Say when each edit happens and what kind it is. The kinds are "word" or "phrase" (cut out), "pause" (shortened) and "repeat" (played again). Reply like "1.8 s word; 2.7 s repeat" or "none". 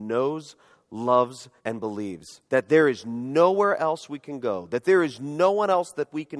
1.6 s pause; 2.5 s pause